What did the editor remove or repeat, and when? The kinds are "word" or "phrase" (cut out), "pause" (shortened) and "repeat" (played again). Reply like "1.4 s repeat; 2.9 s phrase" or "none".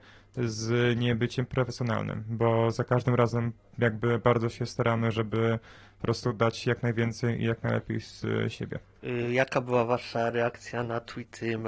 none